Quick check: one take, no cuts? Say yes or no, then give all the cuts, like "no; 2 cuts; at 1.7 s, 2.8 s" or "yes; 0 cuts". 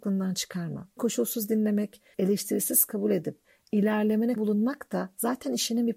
no; 3 cuts; at 1.0 s, 2.1 s, 4.4 s